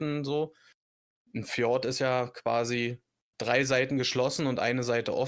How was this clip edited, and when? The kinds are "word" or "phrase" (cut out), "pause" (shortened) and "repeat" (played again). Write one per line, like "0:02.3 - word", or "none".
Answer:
none